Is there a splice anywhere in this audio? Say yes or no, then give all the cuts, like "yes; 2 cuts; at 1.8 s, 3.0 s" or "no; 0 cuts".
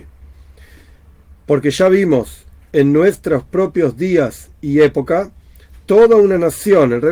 no; 0 cuts